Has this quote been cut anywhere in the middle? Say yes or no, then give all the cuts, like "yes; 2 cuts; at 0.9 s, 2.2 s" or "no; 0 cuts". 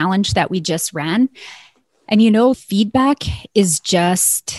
yes; 1 cut; at 2.5 s